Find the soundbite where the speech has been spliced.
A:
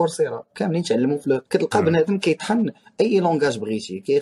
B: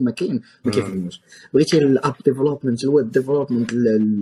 A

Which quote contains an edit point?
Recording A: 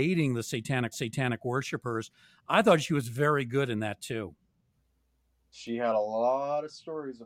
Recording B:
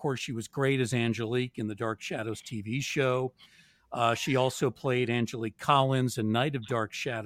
A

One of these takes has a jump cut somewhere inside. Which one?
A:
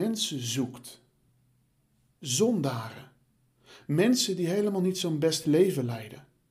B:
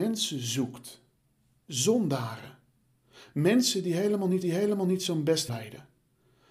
B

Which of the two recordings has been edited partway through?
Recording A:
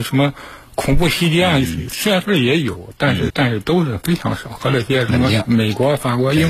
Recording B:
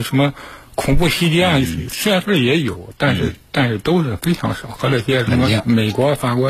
A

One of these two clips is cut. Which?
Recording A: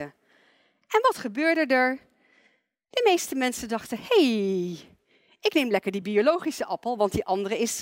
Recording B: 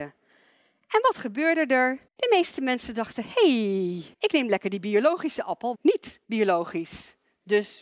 B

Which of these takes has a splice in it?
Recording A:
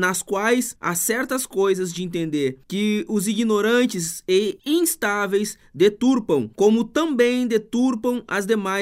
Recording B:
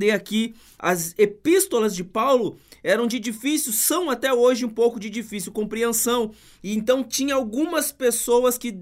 A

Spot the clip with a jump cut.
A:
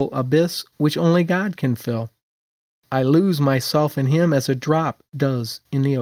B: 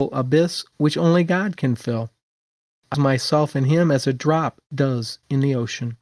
B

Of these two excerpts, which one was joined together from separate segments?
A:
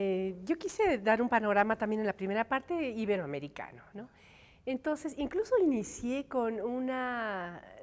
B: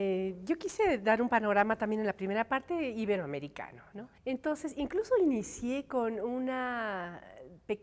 B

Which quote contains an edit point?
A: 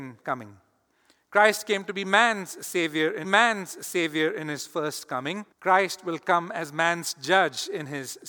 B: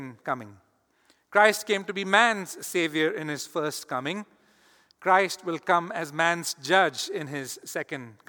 A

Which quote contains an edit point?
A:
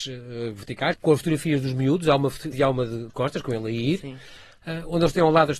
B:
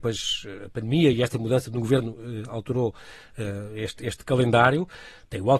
A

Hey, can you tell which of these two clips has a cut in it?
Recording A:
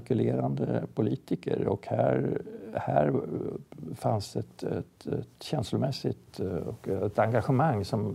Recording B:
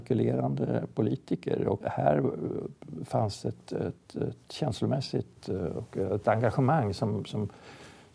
B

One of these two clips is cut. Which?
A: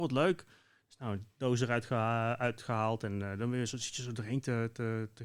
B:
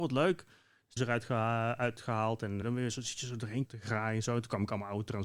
B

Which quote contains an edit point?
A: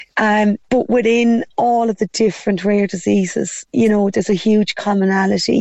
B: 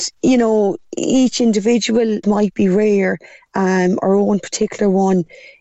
B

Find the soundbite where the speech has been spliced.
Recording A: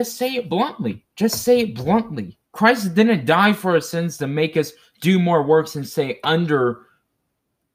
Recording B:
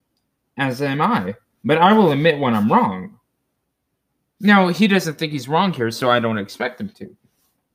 A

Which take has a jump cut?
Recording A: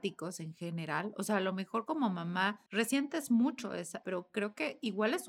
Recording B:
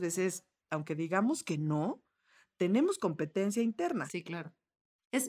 A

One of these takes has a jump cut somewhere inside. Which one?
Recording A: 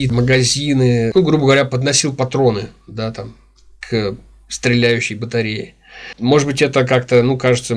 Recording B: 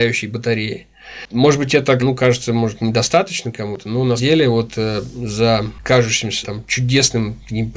B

